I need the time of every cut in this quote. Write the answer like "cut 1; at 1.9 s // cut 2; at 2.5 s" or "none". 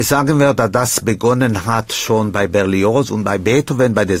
none